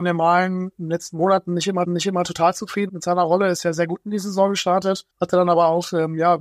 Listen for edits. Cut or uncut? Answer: cut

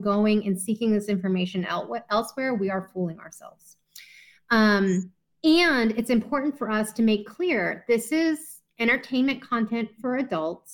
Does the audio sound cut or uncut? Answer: uncut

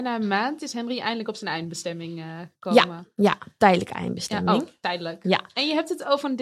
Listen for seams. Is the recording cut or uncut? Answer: uncut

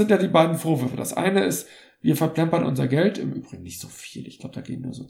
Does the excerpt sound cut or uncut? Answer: uncut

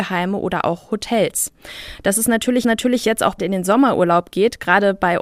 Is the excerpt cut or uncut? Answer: cut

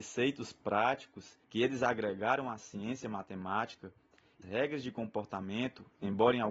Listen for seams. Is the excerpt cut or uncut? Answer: cut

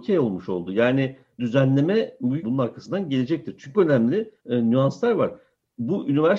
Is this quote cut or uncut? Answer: cut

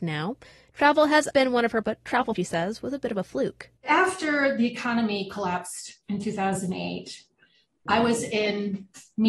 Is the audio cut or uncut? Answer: cut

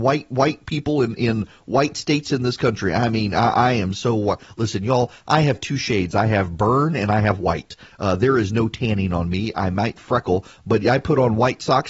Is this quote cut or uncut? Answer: uncut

